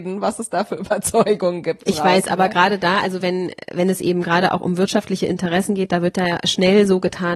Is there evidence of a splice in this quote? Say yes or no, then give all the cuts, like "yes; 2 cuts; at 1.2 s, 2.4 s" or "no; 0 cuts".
no; 0 cuts